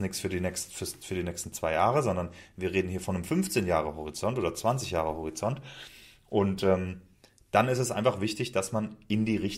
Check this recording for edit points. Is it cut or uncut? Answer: uncut